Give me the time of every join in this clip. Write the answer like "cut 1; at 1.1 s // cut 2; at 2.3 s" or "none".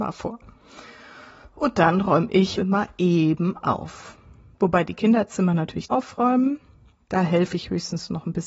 cut 1; at 2.6 s // cut 2; at 5.9 s